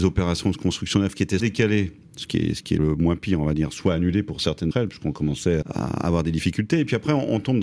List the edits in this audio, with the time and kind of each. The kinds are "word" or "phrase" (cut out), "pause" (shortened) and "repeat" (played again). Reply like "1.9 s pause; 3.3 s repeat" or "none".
1.4 s word; 2.8 s word; 4.7 s word; 5.6 s word